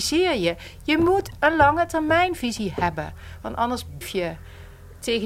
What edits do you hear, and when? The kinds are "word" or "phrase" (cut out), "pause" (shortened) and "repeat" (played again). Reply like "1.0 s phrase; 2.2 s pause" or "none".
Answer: 4.0 s word